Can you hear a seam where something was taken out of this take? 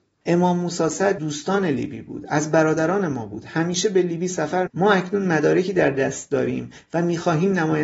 yes; 2 cuts; at 1.2 s, 4.7 s

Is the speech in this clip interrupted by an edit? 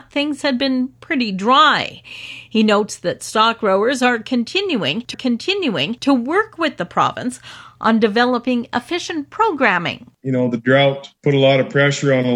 yes; 3 cuts; at 5.1 s, 10.1 s, 11.2 s

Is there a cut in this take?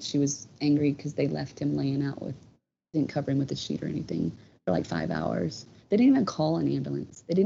no; 0 cuts

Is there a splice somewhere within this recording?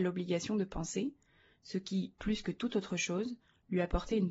no; 0 cuts

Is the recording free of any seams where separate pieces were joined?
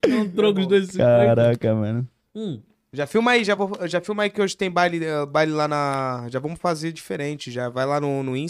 yes; 0 cuts

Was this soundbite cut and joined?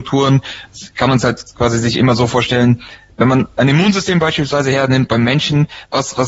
no; 0 cuts

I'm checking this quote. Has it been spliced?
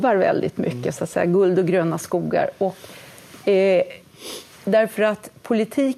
no; 0 cuts

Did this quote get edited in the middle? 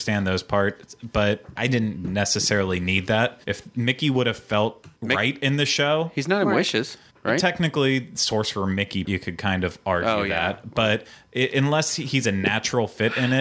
yes; 5 cuts; at 1.6 s, 3.4 s, 4.9 s, 7.1 s, 9.0 s

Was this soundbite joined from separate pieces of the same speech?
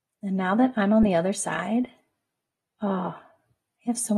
no; 0 cuts

